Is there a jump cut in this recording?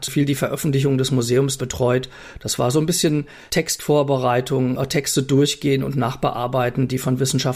yes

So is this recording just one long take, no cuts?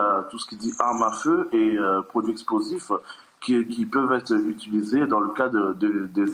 yes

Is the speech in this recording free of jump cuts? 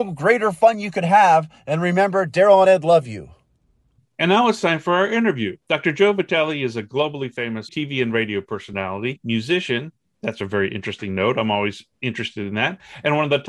no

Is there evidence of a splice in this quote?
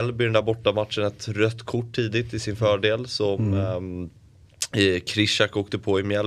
no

